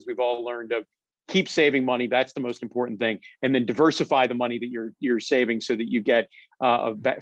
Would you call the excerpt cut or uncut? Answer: uncut